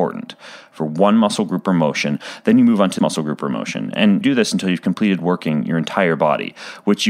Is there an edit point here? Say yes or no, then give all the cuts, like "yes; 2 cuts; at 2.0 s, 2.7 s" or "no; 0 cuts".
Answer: yes; 2 cuts; at 3.0 s, 4.2 s